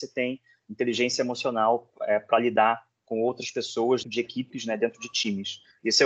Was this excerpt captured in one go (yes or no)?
no